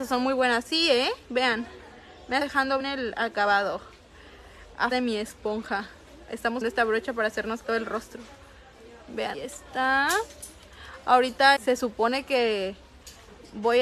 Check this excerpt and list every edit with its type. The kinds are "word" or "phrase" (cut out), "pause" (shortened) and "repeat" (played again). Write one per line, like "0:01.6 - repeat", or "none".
0:02.4 - word
0:02.8 - word
0:04.9 - word
0:06.6 - word
0:07.6 - word
0:09.3 - word
0:11.6 - word